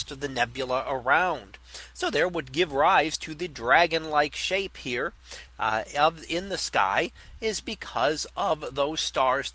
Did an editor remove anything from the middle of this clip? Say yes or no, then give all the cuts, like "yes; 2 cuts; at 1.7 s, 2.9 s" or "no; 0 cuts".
no; 0 cuts